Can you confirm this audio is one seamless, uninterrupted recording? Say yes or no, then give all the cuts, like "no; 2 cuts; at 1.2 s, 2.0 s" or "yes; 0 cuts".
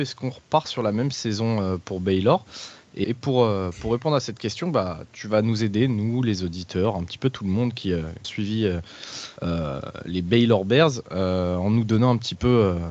no; 3 cuts; at 3.0 s, 8.2 s, 9.4 s